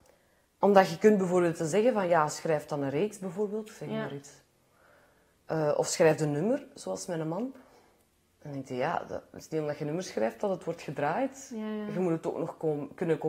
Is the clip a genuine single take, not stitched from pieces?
yes; 0 cuts

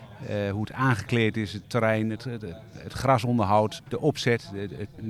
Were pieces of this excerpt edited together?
yes; 2 cuts; at 1.6 s, 3.8 s

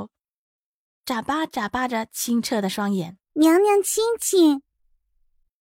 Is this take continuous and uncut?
no; 1 cut; at 3.2 s

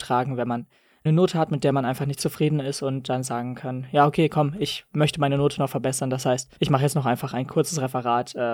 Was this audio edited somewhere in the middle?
yes; 2 cuts; at 1.1 s, 6.6 s

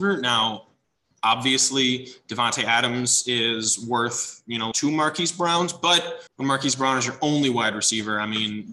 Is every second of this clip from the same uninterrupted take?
no; 2 cuts; at 4.7 s, 6.3 s

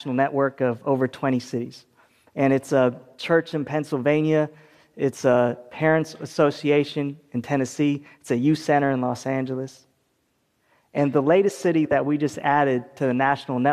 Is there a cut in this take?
no; 0 cuts

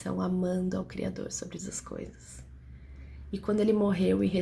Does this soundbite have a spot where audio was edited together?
yes; 1 cut; at 1.6 s

